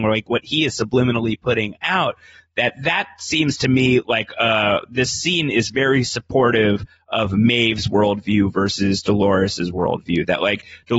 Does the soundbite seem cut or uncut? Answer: uncut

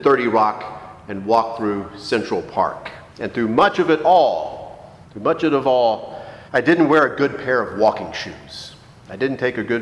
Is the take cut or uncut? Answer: cut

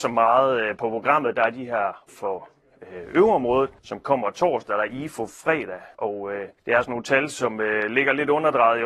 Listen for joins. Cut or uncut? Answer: cut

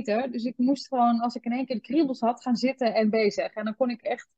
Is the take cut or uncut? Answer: uncut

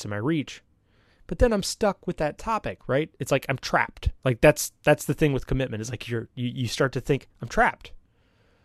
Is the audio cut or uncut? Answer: cut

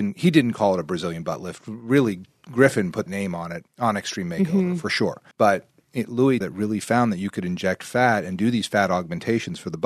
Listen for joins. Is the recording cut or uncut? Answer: cut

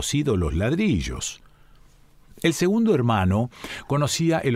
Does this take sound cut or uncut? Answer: uncut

